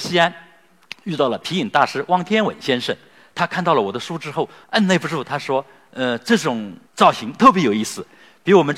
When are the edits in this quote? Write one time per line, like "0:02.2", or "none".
0:04.6
0:06.9